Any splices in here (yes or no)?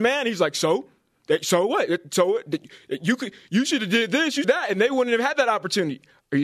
yes